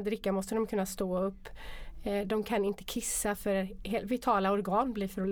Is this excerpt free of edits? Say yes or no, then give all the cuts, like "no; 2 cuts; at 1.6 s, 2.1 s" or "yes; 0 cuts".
yes; 0 cuts